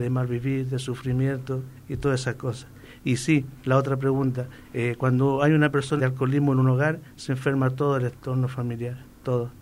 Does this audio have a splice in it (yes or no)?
yes